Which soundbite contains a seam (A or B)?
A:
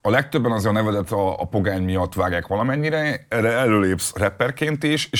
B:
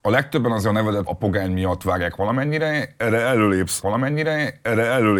B